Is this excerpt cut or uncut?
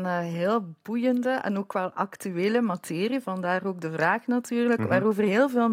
uncut